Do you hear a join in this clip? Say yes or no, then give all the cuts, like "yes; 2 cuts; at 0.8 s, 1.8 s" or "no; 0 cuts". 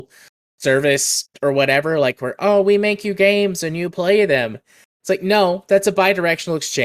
no; 0 cuts